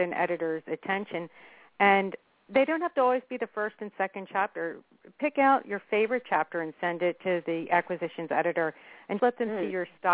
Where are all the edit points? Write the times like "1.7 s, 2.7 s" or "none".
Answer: 9.2 s